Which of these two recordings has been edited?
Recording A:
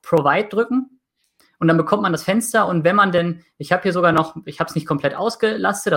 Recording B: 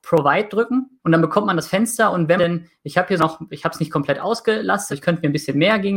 B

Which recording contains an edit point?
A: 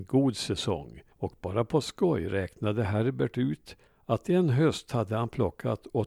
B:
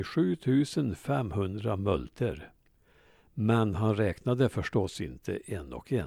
A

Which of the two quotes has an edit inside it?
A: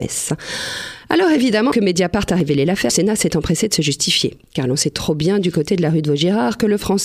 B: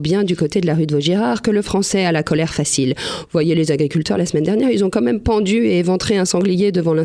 A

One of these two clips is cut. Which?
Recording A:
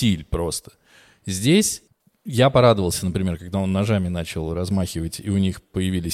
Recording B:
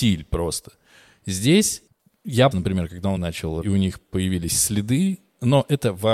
B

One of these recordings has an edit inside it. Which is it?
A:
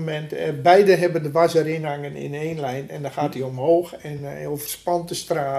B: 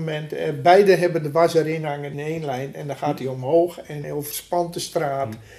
B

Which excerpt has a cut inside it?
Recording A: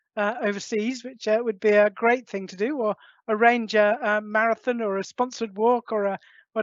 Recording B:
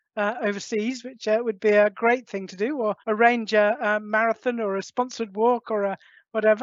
B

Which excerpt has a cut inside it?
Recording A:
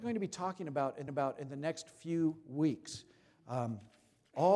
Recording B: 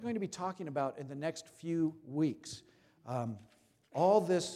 A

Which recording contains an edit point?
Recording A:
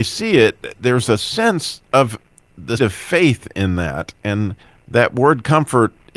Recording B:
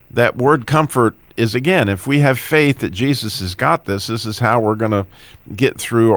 A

